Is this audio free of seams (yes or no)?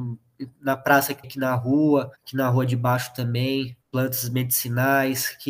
no